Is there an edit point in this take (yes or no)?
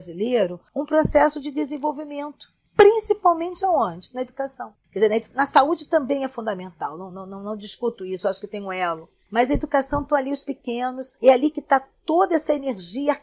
no